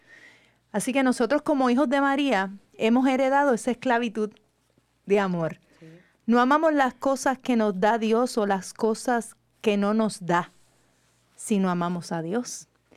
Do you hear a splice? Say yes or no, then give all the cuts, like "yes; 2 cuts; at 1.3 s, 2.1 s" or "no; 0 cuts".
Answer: no; 0 cuts